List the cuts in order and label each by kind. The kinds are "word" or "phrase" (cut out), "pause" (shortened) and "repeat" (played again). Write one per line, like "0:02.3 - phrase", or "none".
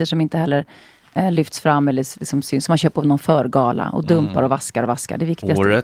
none